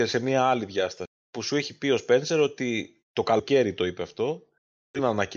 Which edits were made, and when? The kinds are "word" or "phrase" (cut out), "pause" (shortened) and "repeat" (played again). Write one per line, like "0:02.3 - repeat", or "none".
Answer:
0:01.2 - pause
0:03.0 - pause